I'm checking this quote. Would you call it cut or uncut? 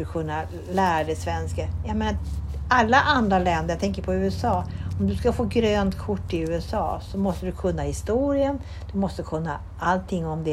uncut